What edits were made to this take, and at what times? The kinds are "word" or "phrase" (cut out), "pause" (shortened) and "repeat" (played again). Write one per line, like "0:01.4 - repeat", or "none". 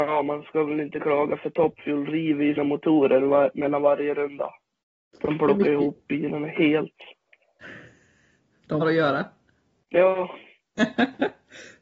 0:02.6 - word
0:08.8 - word